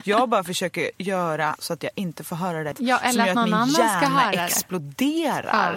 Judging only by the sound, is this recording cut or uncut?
cut